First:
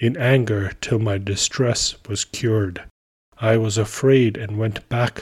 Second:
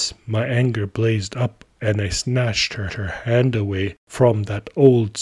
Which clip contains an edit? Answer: second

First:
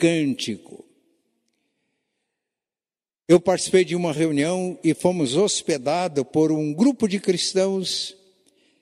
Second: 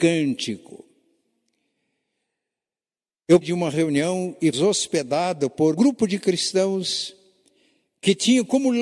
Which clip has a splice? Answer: second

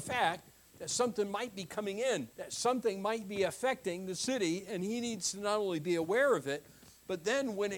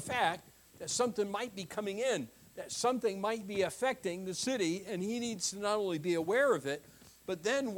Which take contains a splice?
first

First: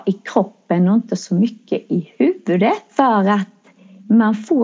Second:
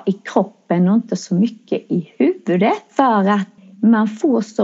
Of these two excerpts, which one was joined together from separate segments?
second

